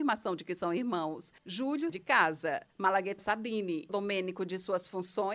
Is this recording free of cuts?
no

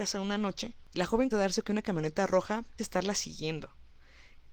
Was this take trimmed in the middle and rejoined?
yes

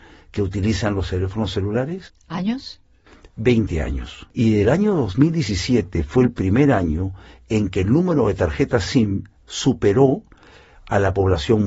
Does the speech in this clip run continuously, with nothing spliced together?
yes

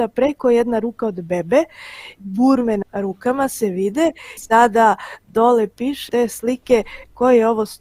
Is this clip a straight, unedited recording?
no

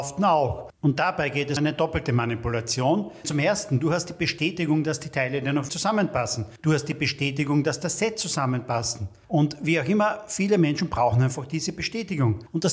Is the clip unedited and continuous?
no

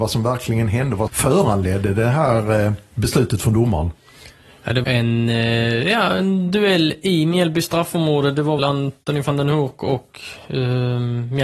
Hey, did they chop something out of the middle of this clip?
yes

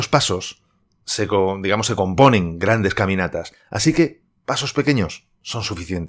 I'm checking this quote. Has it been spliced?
no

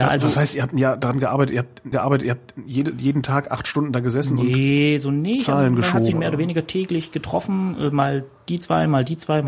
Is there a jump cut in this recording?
yes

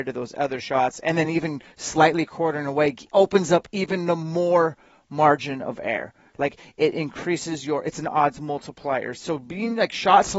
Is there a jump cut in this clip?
no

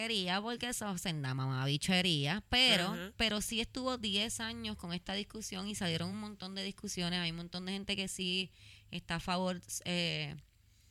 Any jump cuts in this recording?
no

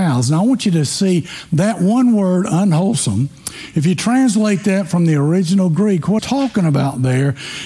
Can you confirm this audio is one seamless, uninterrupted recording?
no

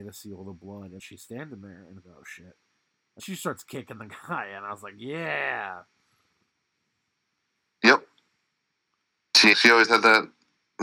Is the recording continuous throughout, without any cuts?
no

